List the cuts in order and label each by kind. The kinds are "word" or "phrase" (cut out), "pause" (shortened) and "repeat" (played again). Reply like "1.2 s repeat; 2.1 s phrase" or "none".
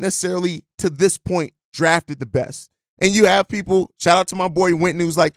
none